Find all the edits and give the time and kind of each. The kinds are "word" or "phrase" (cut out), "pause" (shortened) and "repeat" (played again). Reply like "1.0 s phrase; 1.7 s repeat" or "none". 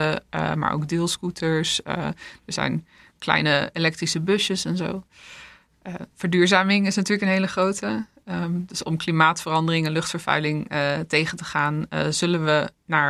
6.1 s pause